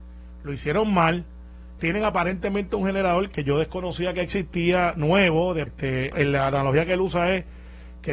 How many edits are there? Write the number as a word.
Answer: three